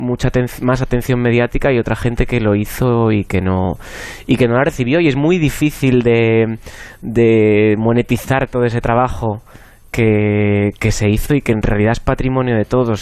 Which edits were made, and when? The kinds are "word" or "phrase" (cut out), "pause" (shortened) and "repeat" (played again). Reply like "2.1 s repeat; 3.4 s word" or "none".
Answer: none

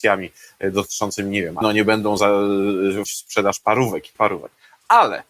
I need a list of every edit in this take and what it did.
1.6 s word; 3.0 s word; 4.1 s word

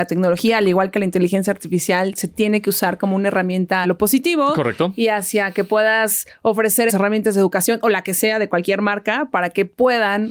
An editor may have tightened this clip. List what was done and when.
3.8 s word; 6.9 s word

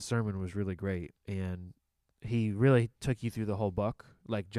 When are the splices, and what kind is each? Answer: 1.2 s pause; 3.0 s pause

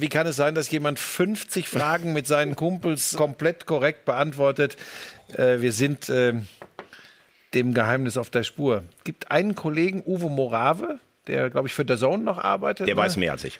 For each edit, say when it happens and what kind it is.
3.1 s word

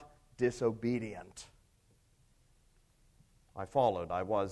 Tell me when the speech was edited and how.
none

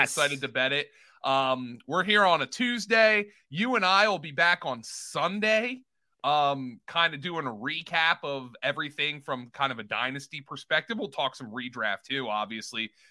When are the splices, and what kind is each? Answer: none

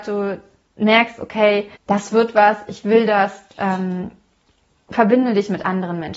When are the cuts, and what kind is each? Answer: 1.8 s pause

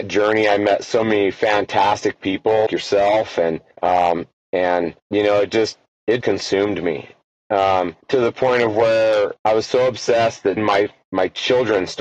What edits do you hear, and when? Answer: 2.7 s word; 3.7 s pause; 5.0 s pause; 6.2 s word; 8.0 s pause; 9.4 s pause; 10.6 s word

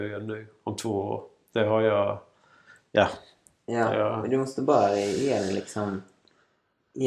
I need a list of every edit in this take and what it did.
none

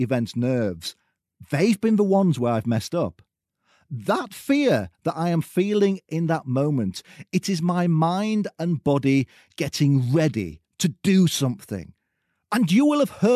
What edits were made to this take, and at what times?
none

